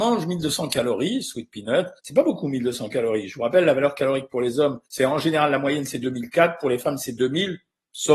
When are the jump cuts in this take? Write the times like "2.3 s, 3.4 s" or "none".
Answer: 2.0 s, 4.8 s